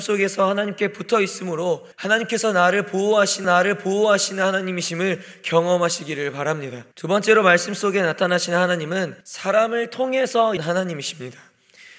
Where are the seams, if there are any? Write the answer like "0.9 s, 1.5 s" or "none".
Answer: 1.9 s, 3.4 s, 6.9 s, 9.2 s, 10.6 s